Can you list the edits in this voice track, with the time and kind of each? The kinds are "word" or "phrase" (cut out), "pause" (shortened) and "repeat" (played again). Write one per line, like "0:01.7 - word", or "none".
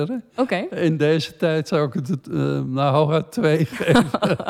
none